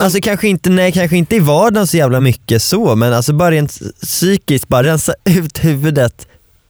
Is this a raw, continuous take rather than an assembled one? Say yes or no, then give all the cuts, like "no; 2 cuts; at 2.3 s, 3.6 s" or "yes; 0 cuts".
yes; 0 cuts